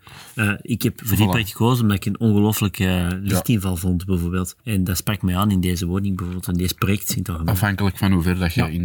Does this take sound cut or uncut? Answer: cut